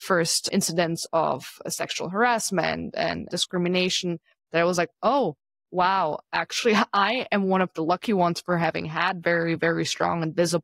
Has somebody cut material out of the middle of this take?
no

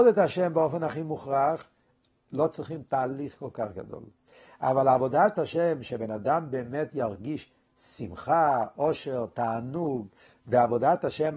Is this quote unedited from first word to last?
yes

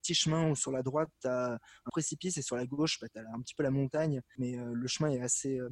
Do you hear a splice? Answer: yes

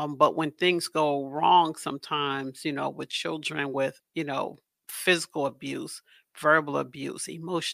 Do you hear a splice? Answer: no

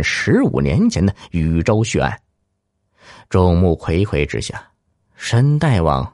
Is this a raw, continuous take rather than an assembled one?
yes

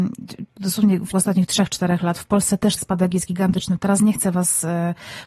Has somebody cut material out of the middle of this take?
yes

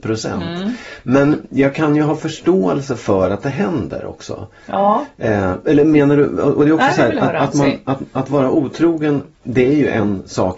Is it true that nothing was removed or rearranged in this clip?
no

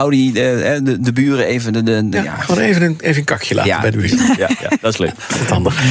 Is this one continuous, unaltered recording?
yes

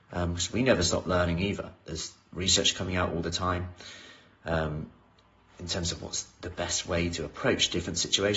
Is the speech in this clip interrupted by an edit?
no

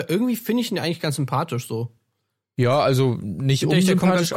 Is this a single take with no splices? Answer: yes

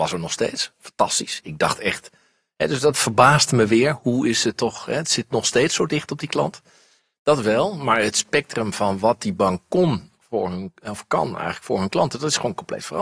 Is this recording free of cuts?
yes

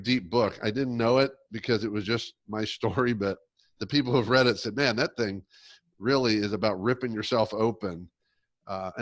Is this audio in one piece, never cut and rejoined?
yes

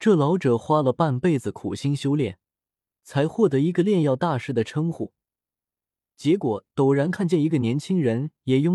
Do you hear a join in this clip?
no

